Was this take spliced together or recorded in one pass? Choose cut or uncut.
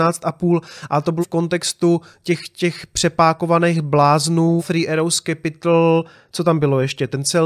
cut